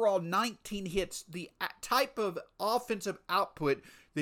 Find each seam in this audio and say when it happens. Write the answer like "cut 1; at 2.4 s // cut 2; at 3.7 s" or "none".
none